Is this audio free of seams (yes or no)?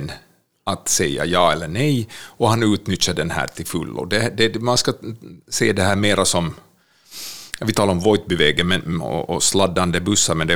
yes